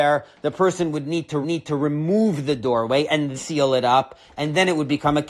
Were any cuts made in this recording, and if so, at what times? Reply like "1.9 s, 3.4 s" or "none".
1.4 s, 3.4 s